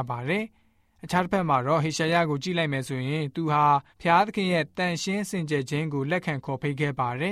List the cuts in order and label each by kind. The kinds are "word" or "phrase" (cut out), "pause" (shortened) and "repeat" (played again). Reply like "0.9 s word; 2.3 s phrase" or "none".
3.9 s pause